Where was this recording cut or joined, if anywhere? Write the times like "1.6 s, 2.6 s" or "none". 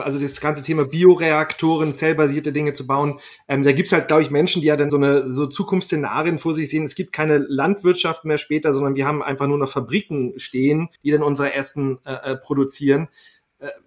4.9 s, 10.9 s